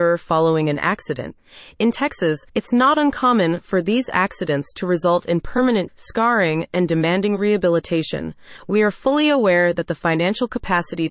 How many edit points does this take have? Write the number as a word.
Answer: two